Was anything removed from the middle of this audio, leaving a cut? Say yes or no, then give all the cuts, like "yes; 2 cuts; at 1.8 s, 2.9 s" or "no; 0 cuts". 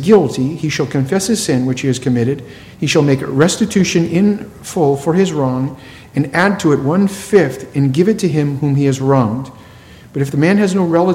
no; 0 cuts